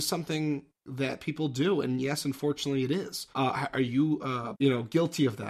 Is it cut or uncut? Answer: cut